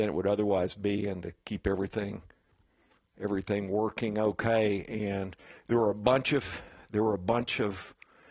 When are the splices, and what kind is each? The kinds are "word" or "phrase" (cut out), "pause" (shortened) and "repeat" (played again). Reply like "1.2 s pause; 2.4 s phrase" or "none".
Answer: 1.4 s pause